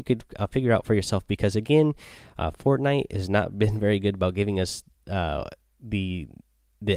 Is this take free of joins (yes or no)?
yes